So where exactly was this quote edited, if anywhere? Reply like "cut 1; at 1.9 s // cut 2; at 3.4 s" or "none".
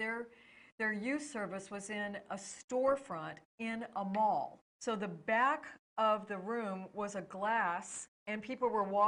cut 1; at 4.7 s // cut 2; at 8.2 s